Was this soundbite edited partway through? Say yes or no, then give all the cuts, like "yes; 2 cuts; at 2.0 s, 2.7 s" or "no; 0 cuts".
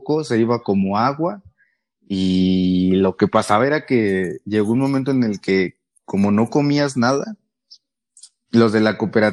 no; 0 cuts